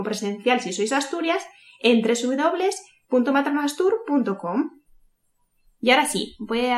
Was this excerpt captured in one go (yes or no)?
yes